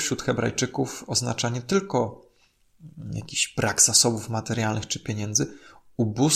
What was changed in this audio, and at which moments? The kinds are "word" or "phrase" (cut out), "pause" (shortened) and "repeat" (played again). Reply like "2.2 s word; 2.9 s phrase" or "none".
none